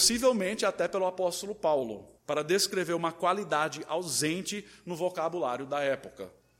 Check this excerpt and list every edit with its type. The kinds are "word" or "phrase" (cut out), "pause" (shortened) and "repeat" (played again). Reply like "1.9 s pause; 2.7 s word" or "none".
2.2 s pause